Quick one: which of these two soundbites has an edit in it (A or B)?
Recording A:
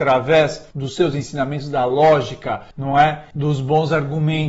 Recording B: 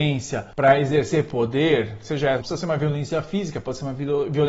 B